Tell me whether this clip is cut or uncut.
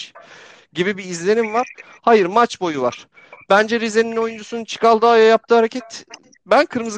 uncut